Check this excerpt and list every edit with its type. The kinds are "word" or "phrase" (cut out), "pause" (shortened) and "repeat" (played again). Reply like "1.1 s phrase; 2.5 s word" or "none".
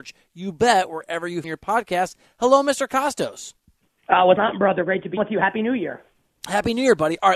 1.4 s word; 4.4 s word; 5.2 s word